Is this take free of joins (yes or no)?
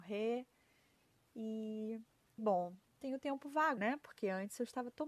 no